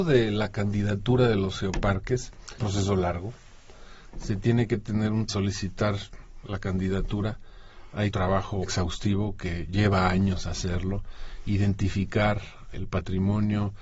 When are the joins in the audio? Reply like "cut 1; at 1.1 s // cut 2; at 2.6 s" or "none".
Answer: cut 1; at 2.6 s // cut 2; at 5.3 s // cut 3; at 8.1 s // cut 4; at 8.6 s // cut 5; at 12.7 s